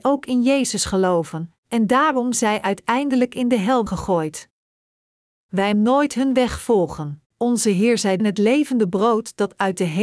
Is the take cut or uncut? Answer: cut